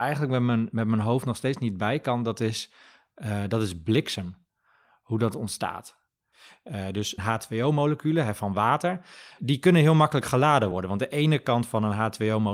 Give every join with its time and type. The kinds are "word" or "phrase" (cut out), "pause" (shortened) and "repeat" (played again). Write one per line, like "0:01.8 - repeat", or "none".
none